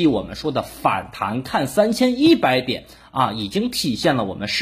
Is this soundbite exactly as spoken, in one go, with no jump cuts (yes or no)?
yes